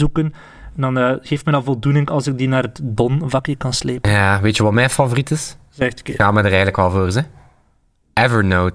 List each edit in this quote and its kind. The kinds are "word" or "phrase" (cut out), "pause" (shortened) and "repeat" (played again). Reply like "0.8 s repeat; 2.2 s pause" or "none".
none